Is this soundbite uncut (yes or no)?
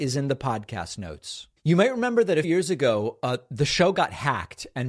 no